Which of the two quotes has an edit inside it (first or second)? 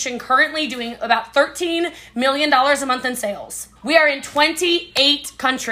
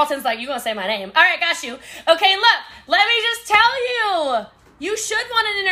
first